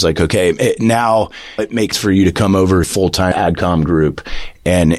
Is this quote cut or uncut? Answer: cut